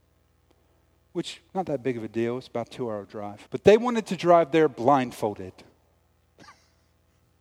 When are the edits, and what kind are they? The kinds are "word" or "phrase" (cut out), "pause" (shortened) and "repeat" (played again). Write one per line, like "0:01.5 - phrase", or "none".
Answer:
0:01.5 - pause
0:03.5 - pause